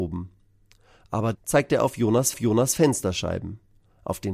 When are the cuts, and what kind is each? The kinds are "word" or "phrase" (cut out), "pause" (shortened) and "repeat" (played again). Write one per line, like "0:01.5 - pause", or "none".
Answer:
0:01.3 - word
0:02.3 - repeat